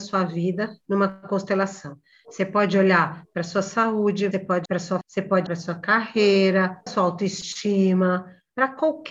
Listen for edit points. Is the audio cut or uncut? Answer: cut